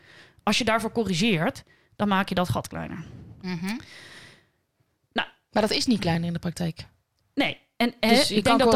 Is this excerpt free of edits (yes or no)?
no